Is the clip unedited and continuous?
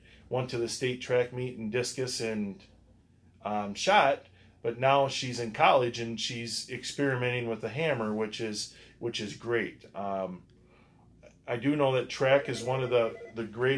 yes; 0 cuts

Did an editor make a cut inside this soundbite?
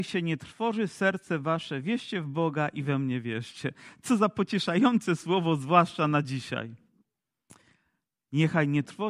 no; 0 cuts

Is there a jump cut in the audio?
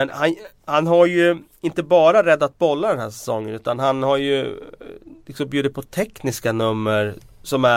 no; 0 cuts

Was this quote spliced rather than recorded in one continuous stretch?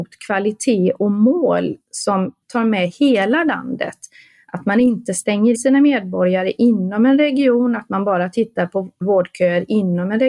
yes; 3 cuts; at 2.4 s, 5.5 s, 9.0 s

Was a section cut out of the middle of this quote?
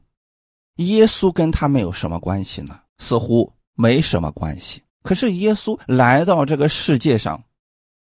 yes; 3 cuts; at 2.9 s, 4.9 s, 5.8 s

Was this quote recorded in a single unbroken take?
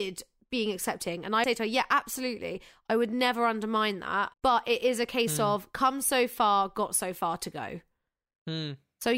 no; 2 cuts; at 1.4 s, 4.3 s

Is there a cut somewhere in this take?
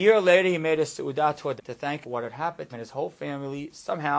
yes; 3 cuts; at 1.6 s, 2.0 s, 2.7 s

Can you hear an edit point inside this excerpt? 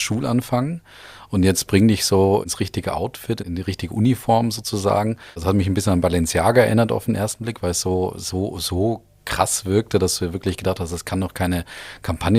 no; 0 cuts

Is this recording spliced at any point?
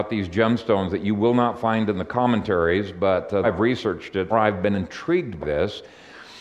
yes; 3 cuts; at 3.4 s, 4.3 s, 5.4 s

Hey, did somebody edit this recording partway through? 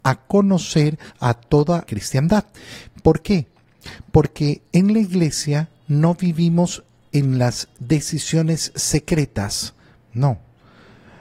yes; 2 cuts; at 1.1 s, 1.9 s

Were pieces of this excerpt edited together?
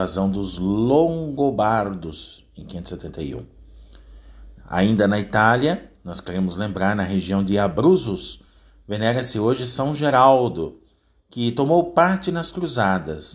no; 0 cuts

